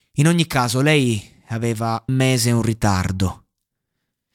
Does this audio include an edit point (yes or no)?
yes